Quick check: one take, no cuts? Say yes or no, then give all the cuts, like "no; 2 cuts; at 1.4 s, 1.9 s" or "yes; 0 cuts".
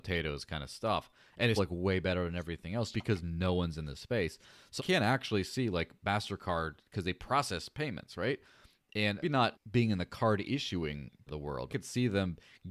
no; 7 cuts; at 1.6 s, 2.9 s, 4.8 s, 9.2 s, 9.5 s, 11.3 s, 11.7 s